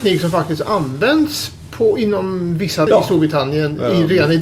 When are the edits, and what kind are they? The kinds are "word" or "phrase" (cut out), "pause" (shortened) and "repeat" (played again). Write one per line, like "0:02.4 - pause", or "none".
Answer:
0:02.9 - word